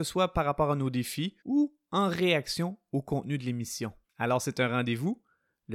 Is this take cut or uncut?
cut